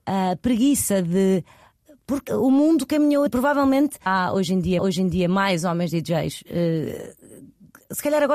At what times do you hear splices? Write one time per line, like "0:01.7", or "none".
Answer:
0:02.3
0:03.3
0:04.1
0:04.8